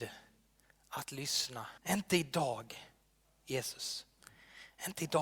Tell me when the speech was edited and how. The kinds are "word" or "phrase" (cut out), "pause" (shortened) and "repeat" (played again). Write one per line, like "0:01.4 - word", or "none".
0:01.8 - pause